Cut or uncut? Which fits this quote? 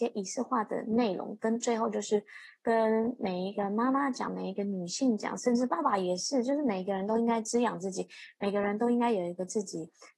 uncut